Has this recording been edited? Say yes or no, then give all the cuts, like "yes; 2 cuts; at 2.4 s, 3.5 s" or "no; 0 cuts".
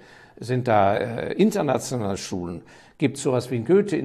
no; 0 cuts